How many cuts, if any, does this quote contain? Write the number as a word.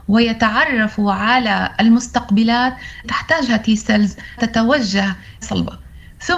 three